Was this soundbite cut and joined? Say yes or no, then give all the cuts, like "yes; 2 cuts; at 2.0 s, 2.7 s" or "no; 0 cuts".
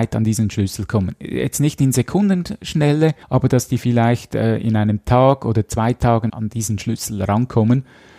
yes; 2 cuts; at 3.2 s, 6.3 s